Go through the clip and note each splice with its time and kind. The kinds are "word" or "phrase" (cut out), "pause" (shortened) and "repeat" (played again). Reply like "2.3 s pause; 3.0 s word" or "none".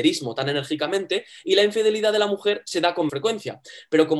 3.1 s word